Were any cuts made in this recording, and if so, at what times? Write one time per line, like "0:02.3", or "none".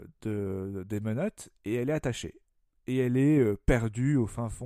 none